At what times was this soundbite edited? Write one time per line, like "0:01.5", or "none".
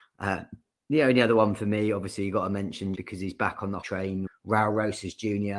0:02.9
0:03.8
0:04.3